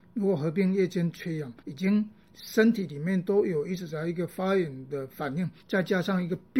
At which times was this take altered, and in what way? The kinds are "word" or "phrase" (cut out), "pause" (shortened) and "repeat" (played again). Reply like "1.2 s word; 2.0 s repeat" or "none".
1.6 s pause; 5.6 s pause